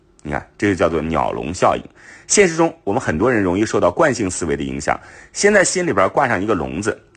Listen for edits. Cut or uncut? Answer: uncut